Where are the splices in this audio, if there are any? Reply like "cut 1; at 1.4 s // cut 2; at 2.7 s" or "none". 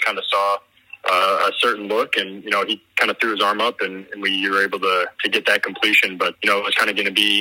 cut 1; at 5.1 s // cut 2; at 6.3 s